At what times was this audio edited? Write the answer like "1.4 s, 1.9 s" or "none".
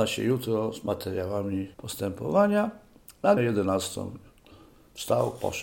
1.7 s, 3.4 s